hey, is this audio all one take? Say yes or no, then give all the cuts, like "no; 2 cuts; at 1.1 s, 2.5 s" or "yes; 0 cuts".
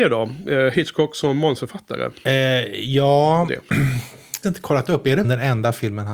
no; 2 cuts; at 4.4 s, 5.2 s